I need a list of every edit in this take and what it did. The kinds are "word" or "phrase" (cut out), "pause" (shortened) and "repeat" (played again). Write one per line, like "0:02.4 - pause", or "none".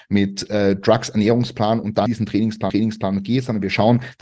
0:02.1 - word
0:02.7 - repeat